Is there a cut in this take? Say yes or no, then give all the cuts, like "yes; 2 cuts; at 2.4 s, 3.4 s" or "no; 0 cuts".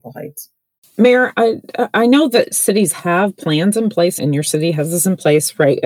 yes; 1 cut; at 4.2 s